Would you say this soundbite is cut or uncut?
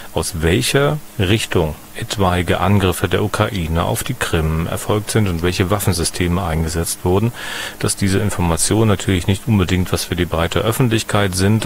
uncut